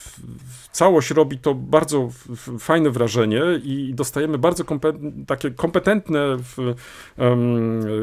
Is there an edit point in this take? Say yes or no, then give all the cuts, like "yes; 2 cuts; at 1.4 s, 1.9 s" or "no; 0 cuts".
no; 0 cuts